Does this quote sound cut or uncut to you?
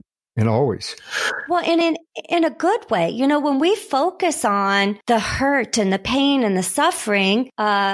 uncut